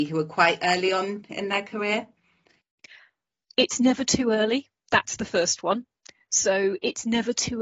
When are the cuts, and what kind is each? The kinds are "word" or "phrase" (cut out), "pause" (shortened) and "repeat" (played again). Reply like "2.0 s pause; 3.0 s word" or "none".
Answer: none